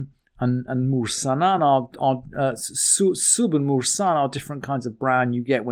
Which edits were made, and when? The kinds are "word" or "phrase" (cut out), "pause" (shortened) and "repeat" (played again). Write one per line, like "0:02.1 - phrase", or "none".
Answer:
none